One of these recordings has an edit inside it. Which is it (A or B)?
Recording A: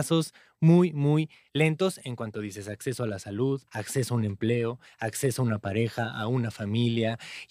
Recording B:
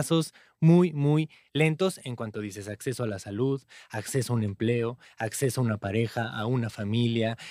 A